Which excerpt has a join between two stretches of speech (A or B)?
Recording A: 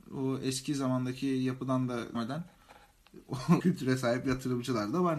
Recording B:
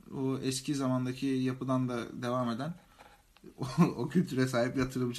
A